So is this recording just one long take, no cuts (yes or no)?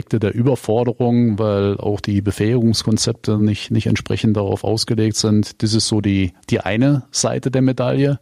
yes